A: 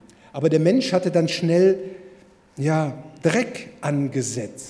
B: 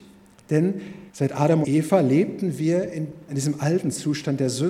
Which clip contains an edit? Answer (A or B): B